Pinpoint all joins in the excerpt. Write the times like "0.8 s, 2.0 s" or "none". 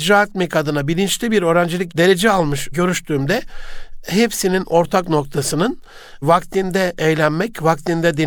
1.9 s, 2.7 s